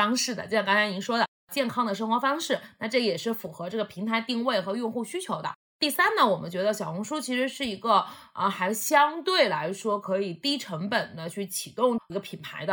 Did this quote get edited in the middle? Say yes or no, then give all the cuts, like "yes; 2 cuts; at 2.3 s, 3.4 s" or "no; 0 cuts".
no; 0 cuts